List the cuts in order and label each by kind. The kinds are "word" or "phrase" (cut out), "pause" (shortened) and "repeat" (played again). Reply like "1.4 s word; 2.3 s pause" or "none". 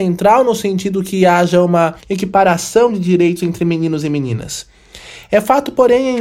2.0 s pause